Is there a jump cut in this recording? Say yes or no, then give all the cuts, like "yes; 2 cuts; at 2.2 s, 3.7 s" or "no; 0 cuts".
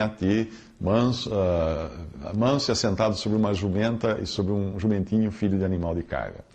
no; 0 cuts